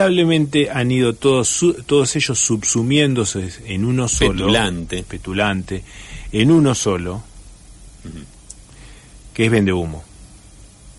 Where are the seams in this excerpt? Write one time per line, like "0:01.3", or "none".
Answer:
none

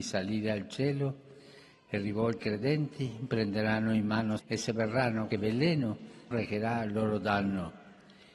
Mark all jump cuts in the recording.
0:02.4
0:04.4
0:05.3
0:06.3

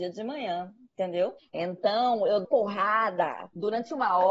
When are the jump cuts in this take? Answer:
0:01.4
0:02.4

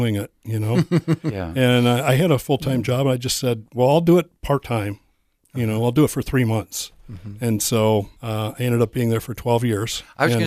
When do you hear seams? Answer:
0:08.2

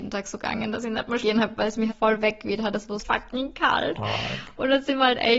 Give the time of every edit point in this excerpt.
0:01.2
0:01.6
0:01.9
0:03.0

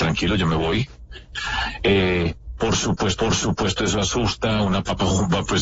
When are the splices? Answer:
0:03.2

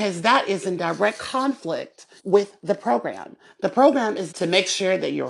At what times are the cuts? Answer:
0:02.2
0:04.3

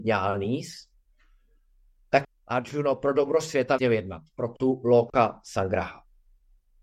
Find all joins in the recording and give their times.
0:02.2
0:03.8

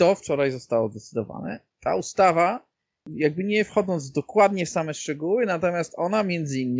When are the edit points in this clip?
none

